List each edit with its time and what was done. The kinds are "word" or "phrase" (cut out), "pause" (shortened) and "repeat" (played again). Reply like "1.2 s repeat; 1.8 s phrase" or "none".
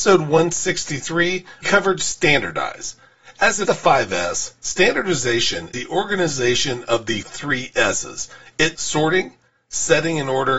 1.6 s word; 3.7 s word; 5.7 s word; 7.2 s word; 8.7 s word